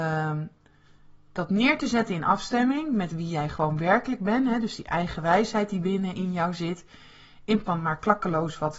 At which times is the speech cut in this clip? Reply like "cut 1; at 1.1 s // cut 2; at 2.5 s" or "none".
cut 1; at 7.7 s

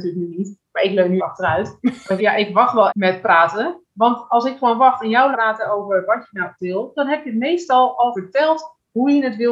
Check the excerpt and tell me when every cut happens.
cut 1; at 1.2 s // cut 2; at 2.2 s // cut 3; at 2.9 s // cut 4; at 5.3 s // cut 5; at 6.6 s // cut 6; at 8.1 s

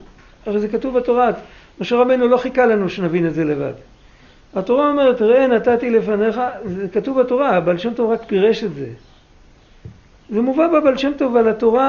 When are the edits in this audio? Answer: none

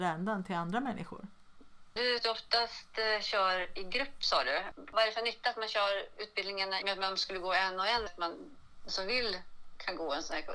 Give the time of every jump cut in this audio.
cut 1; at 2.2 s // cut 2; at 6.8 s // cut 3; at 8.1 s // cut 4; at 8.9 s

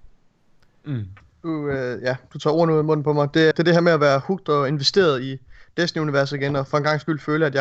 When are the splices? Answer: cut 1; at 3.5 s

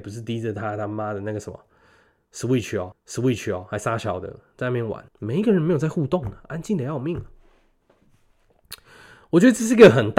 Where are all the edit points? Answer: cut 1; at 2.9 s // cut 2; at 5.1 s

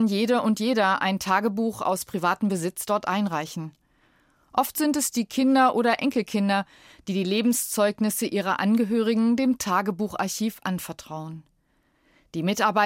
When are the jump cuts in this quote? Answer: none

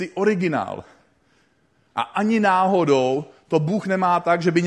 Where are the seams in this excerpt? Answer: none

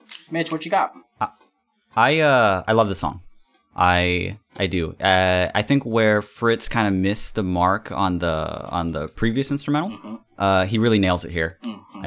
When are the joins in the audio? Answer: none

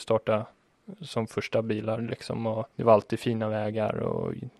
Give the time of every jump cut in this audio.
cut 1; at 2.7 s

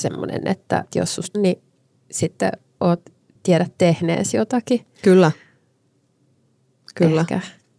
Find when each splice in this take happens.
cut 1; at 0.9 s // cut 2; at 1.3 s // cut 3; at 3.4 s

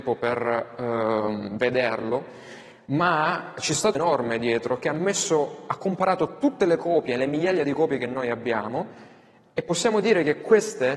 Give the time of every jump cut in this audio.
cut 1; at 3.9 s

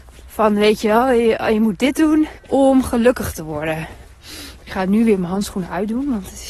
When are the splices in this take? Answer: cut 1; at 2.4 s

